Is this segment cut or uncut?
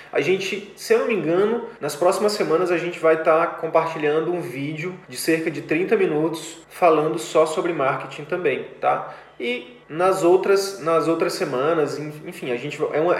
cut